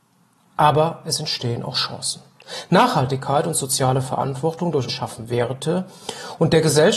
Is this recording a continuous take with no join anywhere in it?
no; 1 cut; at 4.9 s

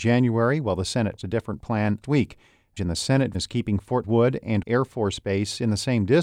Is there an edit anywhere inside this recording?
yes; 6 cuts; at 1.2 s, 2.0 s, 2.8 s, 3.3 s, 4.0 s, 4.6 s

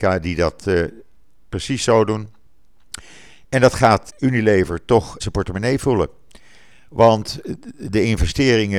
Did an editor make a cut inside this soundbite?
yes; 2 cuts; at 4.1 s, 5.2 s

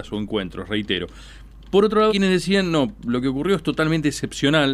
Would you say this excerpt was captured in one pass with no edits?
no; 1 cut; at 2.1 s

